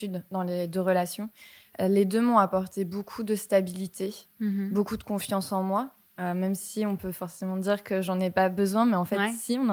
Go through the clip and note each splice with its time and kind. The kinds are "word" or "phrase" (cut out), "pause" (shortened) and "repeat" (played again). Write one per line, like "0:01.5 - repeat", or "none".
none